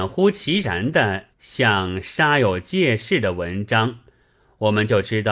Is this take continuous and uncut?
no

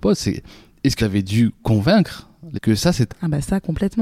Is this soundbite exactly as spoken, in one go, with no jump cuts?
no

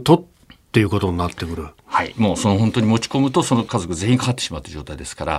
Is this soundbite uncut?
yes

